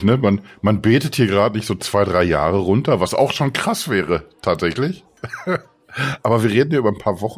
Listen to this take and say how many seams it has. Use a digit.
0